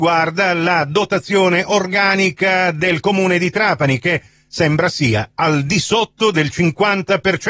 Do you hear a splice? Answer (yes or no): no